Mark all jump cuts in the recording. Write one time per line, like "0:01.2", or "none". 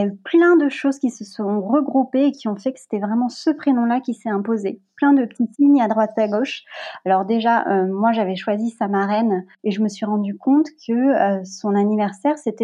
0:05.5